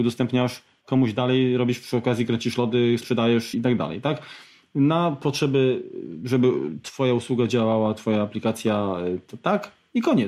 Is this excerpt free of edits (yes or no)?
no